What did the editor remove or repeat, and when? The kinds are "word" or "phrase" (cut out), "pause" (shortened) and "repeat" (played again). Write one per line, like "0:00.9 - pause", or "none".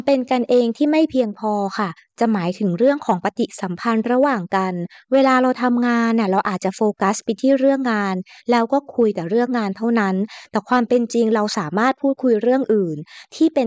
none